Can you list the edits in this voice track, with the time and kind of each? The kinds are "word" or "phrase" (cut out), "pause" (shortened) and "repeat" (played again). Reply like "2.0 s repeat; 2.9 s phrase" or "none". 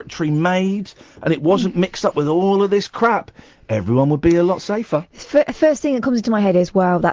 none